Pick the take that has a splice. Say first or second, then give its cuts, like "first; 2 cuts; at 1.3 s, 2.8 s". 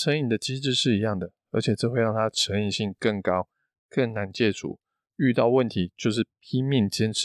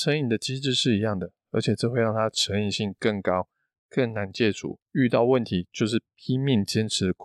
second; 1 cut; at 4.8 s